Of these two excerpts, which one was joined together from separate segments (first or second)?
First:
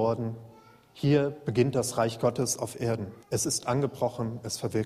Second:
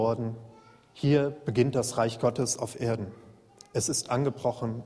first